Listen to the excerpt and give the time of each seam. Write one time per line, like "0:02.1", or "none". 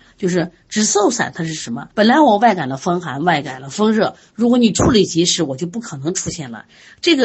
0:01.9